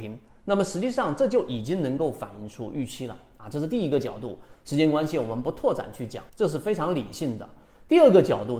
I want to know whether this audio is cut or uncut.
cut